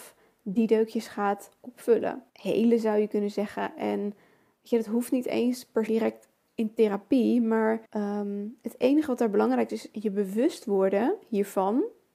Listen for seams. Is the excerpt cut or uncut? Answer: cut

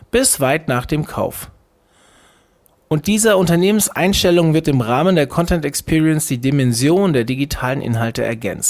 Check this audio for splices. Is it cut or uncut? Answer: uncut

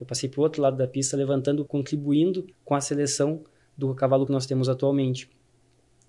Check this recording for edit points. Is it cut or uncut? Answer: cut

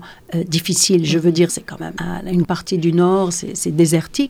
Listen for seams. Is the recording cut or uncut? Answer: cut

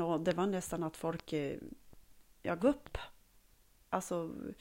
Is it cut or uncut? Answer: cut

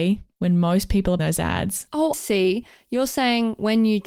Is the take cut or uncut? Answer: cut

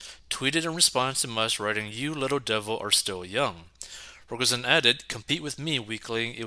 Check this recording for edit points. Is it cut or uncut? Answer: uncut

